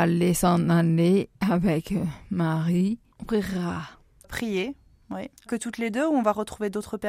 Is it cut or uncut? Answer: cut